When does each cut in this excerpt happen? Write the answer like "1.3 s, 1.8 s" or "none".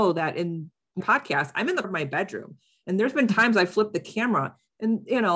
1.0 s, 1.8 s